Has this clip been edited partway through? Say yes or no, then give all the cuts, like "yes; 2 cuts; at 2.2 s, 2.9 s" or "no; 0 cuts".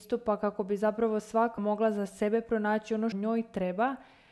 yes; 2 cuts; at 1.6 s, 3.1 s